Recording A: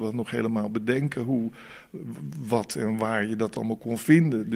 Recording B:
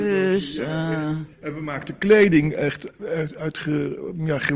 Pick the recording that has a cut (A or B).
B